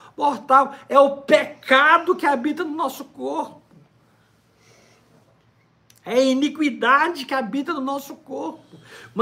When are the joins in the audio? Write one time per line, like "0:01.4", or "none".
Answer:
none